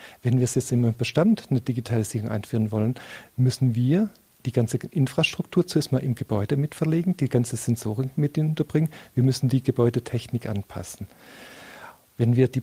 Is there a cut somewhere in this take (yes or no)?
no